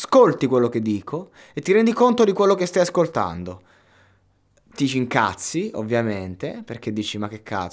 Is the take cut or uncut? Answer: uncut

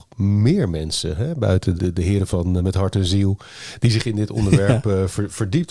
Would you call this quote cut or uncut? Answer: cut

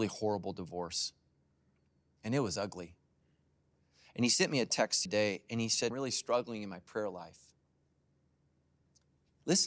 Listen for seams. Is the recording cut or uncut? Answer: cut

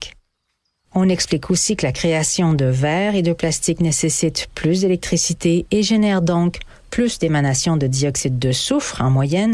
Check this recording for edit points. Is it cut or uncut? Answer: uncut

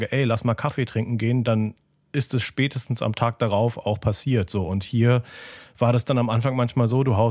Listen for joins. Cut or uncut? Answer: uncut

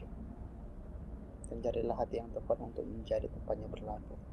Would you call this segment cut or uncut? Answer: uncut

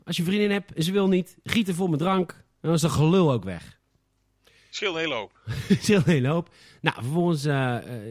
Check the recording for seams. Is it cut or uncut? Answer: uncut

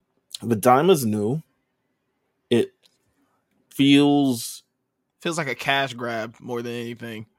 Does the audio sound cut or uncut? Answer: uncut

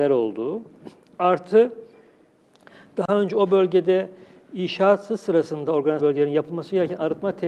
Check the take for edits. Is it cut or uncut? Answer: cut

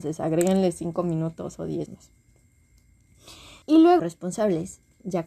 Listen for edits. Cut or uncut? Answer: cut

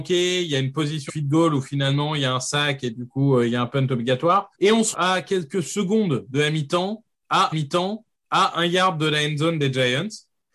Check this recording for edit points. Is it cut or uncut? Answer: cut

